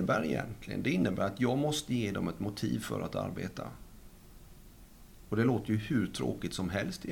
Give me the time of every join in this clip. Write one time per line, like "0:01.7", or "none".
none